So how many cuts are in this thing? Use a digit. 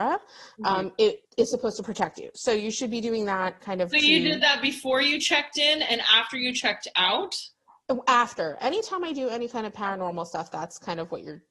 1